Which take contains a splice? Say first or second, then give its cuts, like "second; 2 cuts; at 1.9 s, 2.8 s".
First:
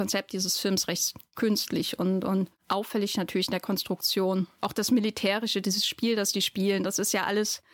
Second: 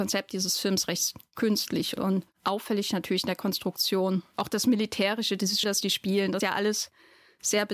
second; 3 cuts; at 2.0 s, 5.6 s, 6.4 s